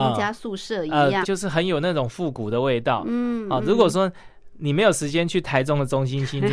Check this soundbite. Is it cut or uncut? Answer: cut